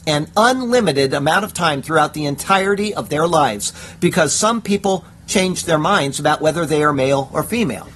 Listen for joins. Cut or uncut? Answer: uncut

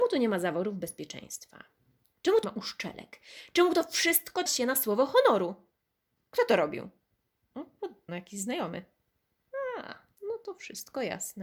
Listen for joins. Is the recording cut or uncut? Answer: cut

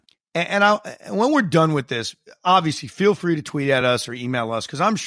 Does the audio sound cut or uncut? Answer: uncut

